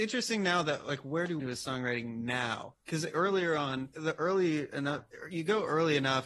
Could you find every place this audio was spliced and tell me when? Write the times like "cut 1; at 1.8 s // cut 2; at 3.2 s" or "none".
cut 1; at 1.4 s // cut 2; at 3.9 s